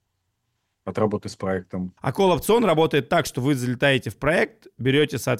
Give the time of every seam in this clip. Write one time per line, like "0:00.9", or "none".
0:02.0